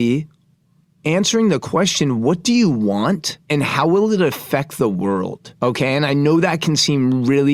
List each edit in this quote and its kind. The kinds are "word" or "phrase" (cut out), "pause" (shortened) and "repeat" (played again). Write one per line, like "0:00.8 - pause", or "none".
0:03.4 - pause
0:05.6 - pause